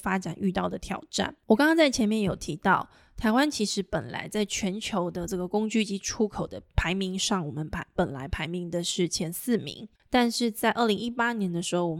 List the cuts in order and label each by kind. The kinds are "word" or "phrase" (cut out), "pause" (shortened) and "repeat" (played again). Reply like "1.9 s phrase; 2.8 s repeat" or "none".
10.0 s pause

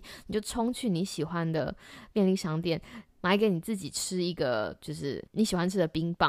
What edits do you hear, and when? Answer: 5.3 s pause

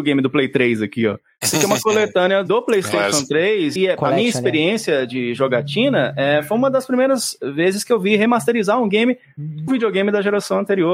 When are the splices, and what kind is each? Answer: 3.8 s word; 9.7 s word

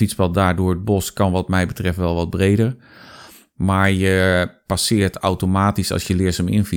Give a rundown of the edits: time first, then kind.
none

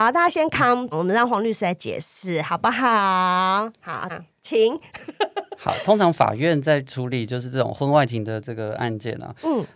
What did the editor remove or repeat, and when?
0.9 s word; 4.1 s phrase

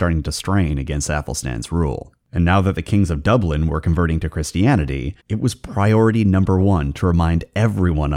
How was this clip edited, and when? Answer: 2.2 s pause; 5.2 s pause

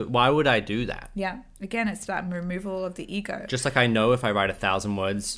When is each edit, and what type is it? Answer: 2.1 s word

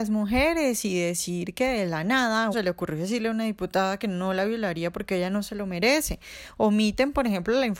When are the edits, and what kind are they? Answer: 2.5 s word

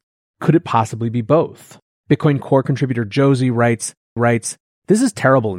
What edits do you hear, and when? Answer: 1.9 s pause; 4.2 s repeat

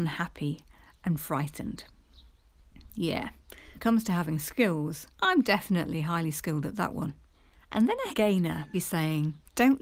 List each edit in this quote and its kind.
3.7 s word; 5.1 s pause; 7.5 s pause; 8.1 s word; 8.7 s word

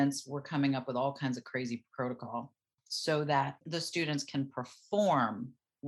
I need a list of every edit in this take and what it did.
none

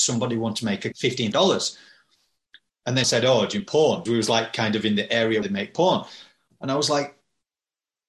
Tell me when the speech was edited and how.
0.9 s word; 1.3 s word; 3.0 s word; 3.6 s word; 4.1 s word; 5.4 s word

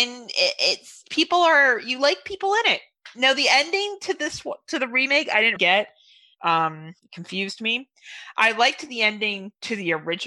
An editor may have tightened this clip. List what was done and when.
5.6 s word

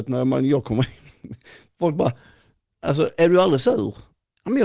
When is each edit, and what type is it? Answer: none

